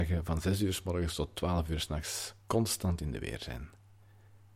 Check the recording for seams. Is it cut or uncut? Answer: uncut